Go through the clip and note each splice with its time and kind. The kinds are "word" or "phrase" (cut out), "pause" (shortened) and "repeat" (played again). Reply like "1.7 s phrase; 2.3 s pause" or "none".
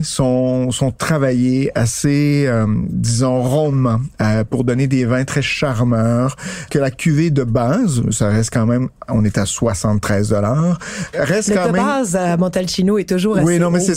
6.7 s word